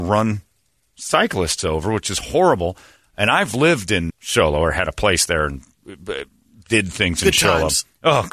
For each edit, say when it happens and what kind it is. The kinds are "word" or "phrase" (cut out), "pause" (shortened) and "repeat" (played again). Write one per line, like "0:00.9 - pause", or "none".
0:04.1 - word